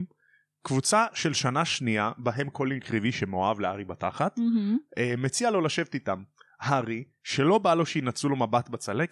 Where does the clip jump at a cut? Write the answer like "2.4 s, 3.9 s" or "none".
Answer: none

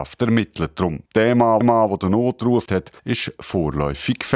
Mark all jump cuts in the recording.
1.1 s, 1.6 s, 2.7 s, 3.0 s

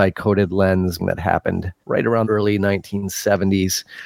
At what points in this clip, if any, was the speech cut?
1.0 s, 1.8 s, 2.2 s

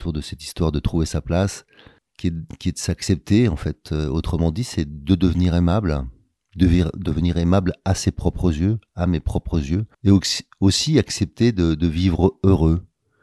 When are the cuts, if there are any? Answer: 2.0 s, 9.9 s

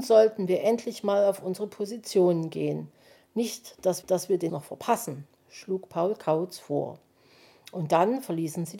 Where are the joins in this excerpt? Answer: 4.0 s, 4.5 s

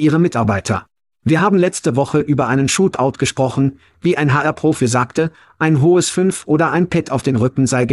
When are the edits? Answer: none

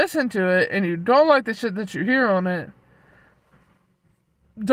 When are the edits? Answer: none

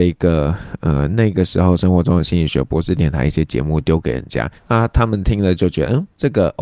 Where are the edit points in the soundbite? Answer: 4.6 s

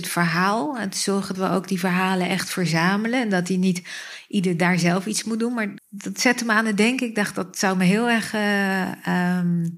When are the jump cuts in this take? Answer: 1.3 s, 5.8 s

